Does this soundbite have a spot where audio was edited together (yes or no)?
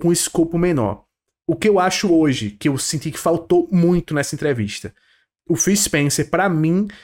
no